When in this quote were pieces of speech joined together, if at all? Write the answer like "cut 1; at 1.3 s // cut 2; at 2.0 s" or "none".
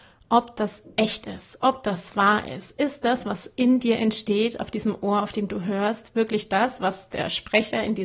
none